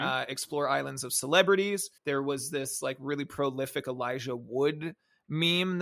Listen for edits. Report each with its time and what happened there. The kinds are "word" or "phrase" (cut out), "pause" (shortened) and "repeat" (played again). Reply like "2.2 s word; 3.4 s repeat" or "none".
2.0 s pause